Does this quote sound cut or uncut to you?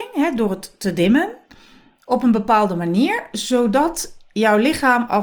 uncut